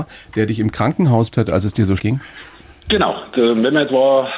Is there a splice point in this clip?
yes; 2 cuts; at 1.3 s, 2.0 s

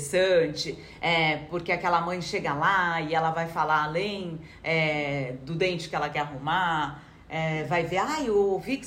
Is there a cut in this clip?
no; 0 cuts

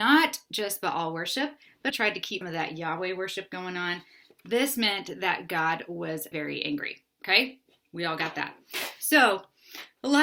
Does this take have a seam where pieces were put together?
yes; 3 cuts; at 1.9 s, 2.4 s, 6.3 s

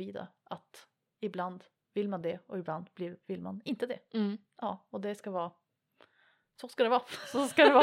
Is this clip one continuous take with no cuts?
yes; 0 cuts

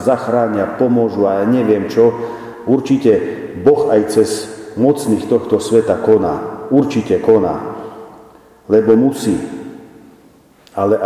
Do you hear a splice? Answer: no; 0 cuts

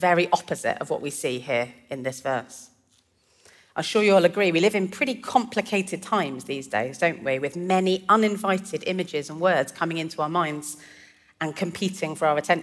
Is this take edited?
no; 0 cuts

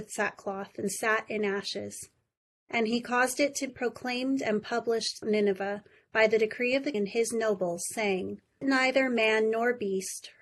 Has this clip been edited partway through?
yes; 4 cuts; at 3.7 s, 5.2 s, 6.9 s, 8.6 s

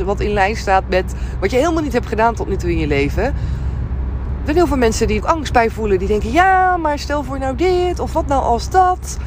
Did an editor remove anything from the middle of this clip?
yes; 1 cut; at 5.2 s

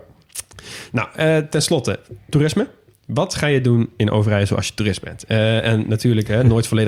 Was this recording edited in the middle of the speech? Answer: no; 0 cuts

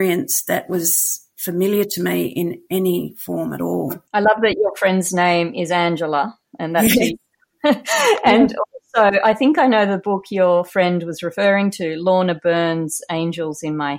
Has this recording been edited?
no; 0 cuts

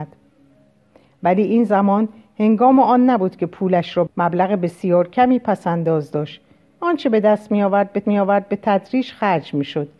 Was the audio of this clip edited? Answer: yes; 2 cuts; at 4.1 s, 8.0 s

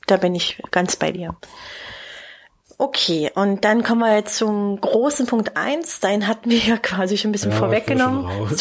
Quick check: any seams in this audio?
no; 0 cuts

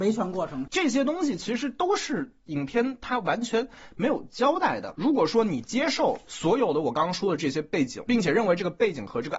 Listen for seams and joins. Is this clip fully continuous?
no; 1 cut; at 8.1 s

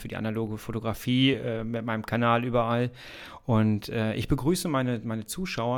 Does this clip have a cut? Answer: no; 0 cuts

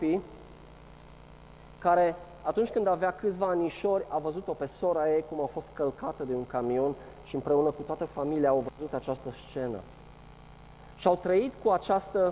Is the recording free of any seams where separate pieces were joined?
yes; 0 cuts

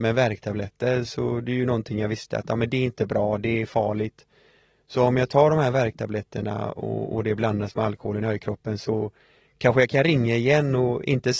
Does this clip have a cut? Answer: no; 0 cuts

